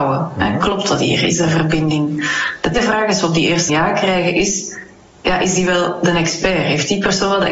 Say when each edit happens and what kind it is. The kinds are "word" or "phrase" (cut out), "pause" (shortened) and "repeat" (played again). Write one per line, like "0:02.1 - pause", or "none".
0:02.7 - word
0:03.7 - word